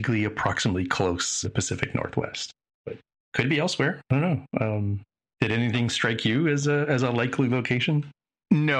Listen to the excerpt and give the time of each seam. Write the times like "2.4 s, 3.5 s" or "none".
1.4 s